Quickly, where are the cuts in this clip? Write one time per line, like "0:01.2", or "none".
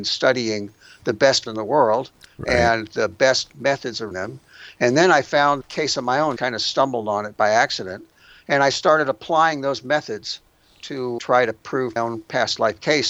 0:01.5
0:04.1
0:05.6
0:06.4
0:11.2
0:12.0